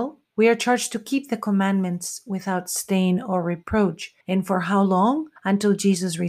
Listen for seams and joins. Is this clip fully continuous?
no; 2 cuts; at 4.2 s, 5.4 s

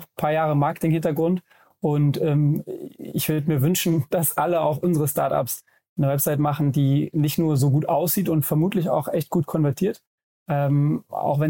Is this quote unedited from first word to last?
yes; 0 cuts

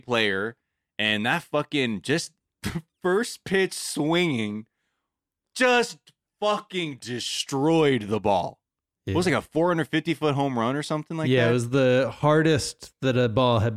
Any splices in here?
no; 0 cuts

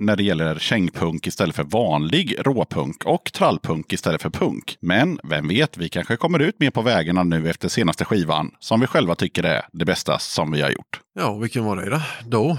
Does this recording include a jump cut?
no; 0 cuts

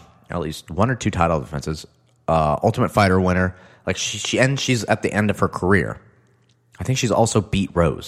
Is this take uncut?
yes; 0 cuts

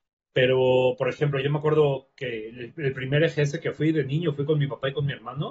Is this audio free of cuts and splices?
yes; 0 cuts

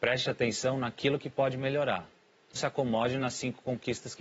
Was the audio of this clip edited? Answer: yes; 1 cut; at 2.6 s

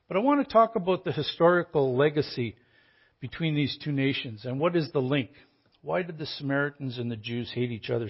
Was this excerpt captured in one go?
yes; 0 cuts

